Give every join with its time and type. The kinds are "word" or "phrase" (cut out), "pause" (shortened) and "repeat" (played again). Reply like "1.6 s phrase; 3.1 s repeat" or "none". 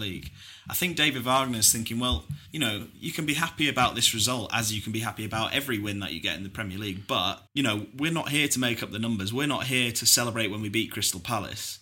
2.5 s pause; 7.5 s pause

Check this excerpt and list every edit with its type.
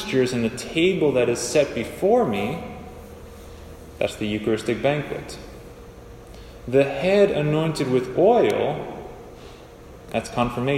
none

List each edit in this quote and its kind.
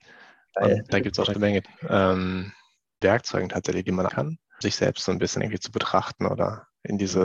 1.3 s word; 1.6 s word; 3.0 s word; 4.1 s word; 4.6 s word; 5.4 s word

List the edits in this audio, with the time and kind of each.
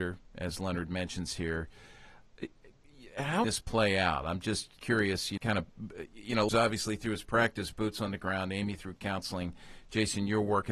3.4 s phrase; 4.8 s pause; 5.4 s word; 6.5 s word

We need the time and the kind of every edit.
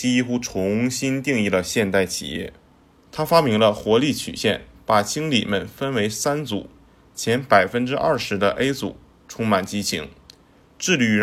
none

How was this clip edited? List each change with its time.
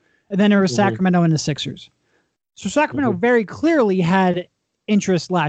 none

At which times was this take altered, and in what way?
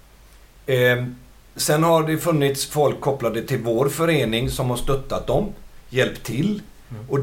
1.6 s word

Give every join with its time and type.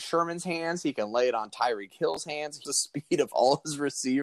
2.6 s word

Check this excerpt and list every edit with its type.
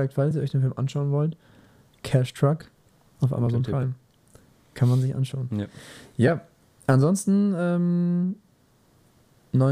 none

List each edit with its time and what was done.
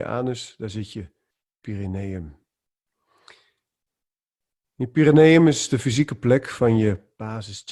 none

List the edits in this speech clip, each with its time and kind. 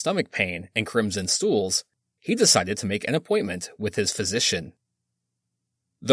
none

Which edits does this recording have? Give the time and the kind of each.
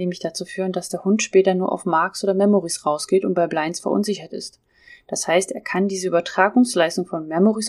none

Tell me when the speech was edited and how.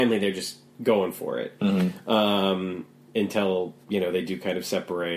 3.8 s pause

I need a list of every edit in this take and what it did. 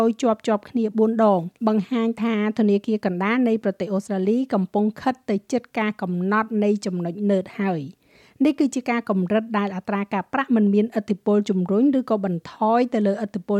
1.6 s pause

